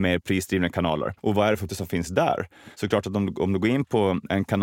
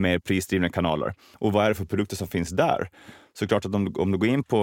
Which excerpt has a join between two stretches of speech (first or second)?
first